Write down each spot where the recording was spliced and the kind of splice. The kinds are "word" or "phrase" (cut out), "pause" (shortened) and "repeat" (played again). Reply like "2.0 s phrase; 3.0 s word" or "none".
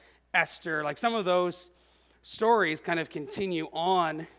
none